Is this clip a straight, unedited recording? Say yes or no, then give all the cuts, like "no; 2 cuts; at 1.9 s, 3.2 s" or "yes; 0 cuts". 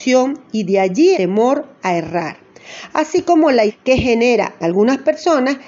no; 3 cuts; at 1.1 s, 3.7 s, 4.6 s